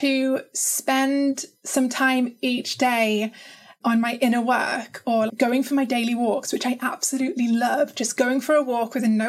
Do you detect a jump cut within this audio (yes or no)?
yes